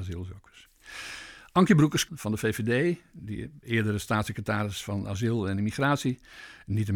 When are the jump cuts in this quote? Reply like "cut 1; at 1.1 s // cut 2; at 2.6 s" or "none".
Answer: cut 1; at 2.1 s